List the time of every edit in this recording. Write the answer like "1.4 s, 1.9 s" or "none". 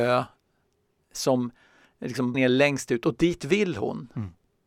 2.3 s